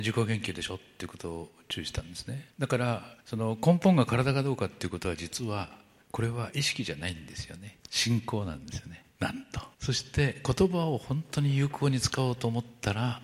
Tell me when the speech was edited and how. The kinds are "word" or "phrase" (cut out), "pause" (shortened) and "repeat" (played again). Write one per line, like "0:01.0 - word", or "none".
0:02.5 - pause
0:03.2 - pause
0:06.0 - pause
0:07.8 - pause
0:09.1 - pause
0:09.7 - pause